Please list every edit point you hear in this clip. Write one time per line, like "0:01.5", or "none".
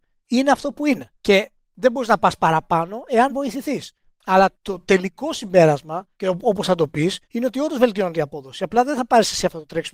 0:01.2
0:03.3
0:04.5
0:06.1
0:07.2